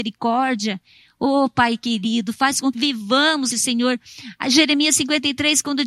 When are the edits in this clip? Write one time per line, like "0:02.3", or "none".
0:02.7
0:03.5